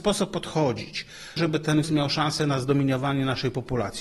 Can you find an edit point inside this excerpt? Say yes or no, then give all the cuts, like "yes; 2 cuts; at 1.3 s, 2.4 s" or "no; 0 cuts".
yes; 2 cuts; at 1.4 s, 1.8 s